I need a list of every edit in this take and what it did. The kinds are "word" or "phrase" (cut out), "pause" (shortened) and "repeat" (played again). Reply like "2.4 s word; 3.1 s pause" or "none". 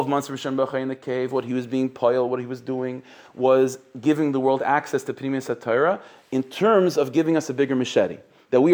none